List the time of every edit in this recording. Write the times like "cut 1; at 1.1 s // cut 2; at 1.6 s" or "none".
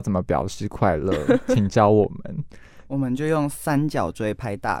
none